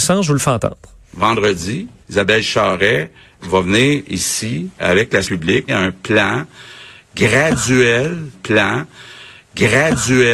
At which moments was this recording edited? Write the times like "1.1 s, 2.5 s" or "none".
2.0 s, 3.4 s, 4.8 s, 5.2 s, 5.7 s, 8.3 s